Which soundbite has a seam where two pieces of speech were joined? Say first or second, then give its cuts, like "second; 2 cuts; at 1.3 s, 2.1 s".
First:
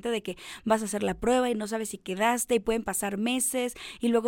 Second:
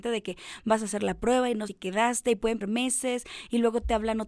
second; 2 cuts; at 1.7 s, 2.6 s